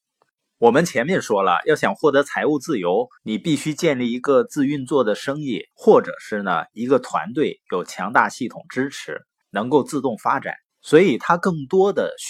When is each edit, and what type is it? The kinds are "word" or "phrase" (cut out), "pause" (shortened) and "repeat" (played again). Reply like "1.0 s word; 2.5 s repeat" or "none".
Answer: 3.2 s pause; 5.7 s pause; 9.4 s pause; 10.6 s pause